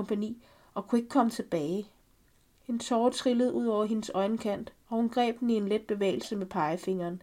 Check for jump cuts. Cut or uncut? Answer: uncut